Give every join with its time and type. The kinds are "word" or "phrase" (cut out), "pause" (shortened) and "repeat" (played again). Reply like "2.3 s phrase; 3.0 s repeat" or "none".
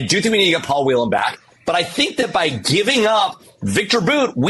none